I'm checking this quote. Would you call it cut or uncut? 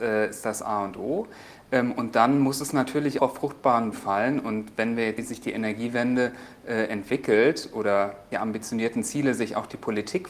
cut